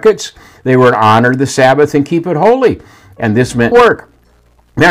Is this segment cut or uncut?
cut